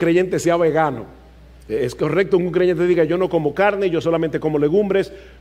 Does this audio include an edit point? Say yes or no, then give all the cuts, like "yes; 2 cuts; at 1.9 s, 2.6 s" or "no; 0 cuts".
no; 0 cuts